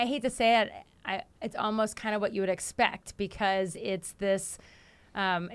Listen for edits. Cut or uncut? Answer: cut